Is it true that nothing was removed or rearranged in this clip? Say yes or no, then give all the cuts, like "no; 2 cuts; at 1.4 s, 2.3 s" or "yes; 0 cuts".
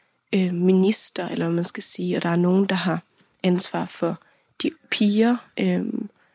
no; 1 cut; at 4.8 s